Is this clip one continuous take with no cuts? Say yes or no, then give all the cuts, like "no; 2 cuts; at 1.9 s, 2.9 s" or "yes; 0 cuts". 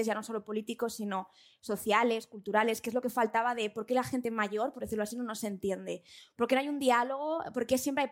yes; 0 cuts